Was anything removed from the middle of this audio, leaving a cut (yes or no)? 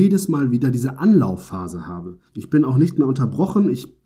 yes